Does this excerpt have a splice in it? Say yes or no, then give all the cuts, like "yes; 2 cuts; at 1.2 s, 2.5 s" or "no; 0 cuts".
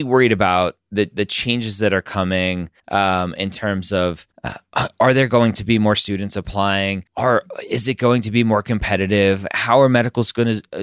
yes; 3 cuts; at 2.8 s, 4.3 s, 7.1 s